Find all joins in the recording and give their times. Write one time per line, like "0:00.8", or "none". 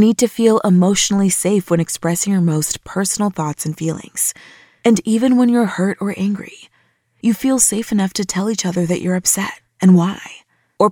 none